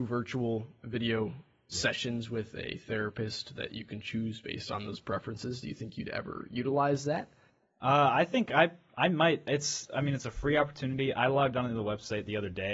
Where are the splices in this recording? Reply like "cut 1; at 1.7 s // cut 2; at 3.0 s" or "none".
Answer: none